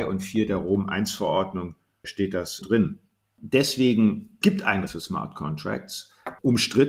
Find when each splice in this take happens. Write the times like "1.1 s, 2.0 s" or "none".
2.0 s, 2.6 s, 4.4 s, 4.9 s